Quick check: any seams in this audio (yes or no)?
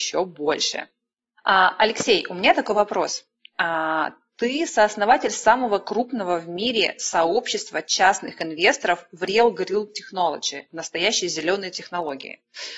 no